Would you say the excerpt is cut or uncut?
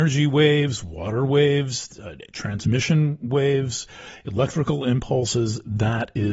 uncut